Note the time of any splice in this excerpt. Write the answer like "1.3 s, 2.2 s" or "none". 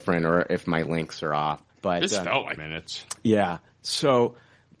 1.7 s, 2.6 s